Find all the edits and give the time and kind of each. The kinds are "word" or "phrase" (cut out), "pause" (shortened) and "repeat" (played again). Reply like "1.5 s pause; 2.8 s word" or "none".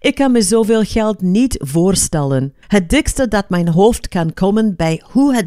2.6 s pause